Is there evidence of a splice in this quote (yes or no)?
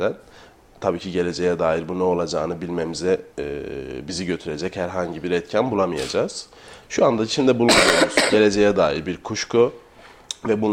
yes